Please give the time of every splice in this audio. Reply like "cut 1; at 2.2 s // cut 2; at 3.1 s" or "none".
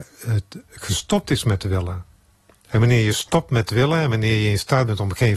none